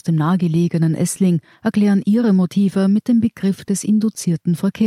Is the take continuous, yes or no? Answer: yes